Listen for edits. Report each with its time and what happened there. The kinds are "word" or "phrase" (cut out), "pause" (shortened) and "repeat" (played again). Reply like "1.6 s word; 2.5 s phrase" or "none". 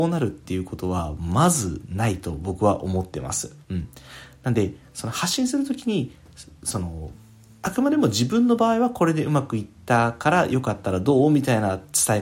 3.6 s pause